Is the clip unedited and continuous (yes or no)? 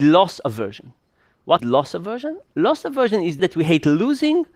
no